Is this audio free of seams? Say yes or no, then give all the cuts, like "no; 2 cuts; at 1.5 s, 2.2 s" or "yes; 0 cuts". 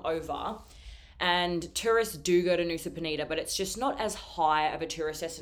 yes; 0 cuts